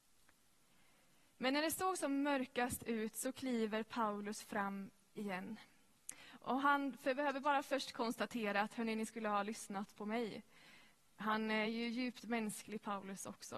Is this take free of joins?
yes; 0 cuts

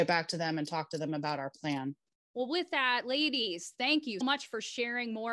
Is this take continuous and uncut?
no; 1 cut; at 4.2 s

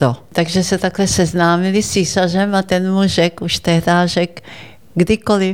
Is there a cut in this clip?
no; 0 cuts

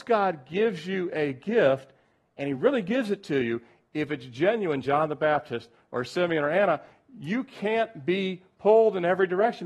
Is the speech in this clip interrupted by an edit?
no; 0 cuts

